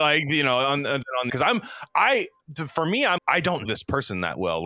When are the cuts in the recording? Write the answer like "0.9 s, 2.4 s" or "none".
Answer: 1.3 s, 3.2 s, 3.7 s

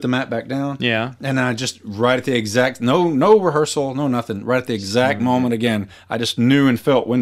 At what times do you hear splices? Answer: none

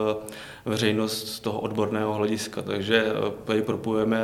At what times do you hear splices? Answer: none

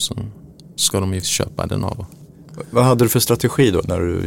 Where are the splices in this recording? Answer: 1.2 s, 1.9 s

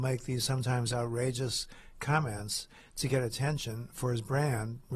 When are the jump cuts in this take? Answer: none

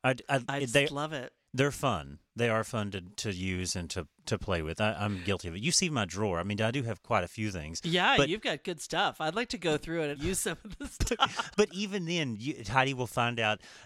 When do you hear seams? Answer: 10.2 s, 11.5 s

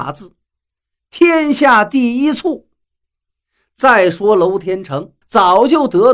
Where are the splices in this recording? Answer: 2.8 s, 5.2 s

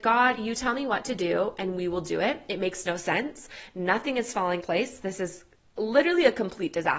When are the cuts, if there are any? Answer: 4.6 s

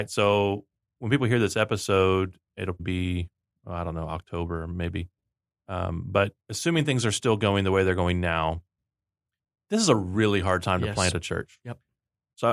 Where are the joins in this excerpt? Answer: 2.8 s, 6.4 s

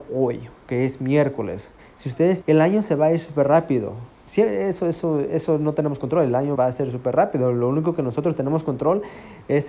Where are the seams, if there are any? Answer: 1.8 s, 2.4 s, 6.6 s

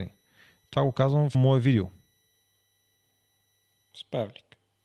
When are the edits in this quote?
1.3 s

